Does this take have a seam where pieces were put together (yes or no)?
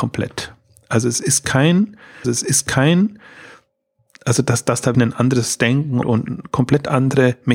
yes